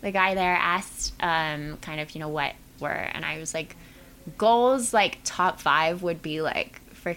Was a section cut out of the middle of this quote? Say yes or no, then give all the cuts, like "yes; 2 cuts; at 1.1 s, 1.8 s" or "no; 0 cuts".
yes; 1 cut; at 2.8 s